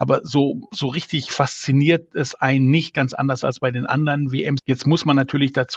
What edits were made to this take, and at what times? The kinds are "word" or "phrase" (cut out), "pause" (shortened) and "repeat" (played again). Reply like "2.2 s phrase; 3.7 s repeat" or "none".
none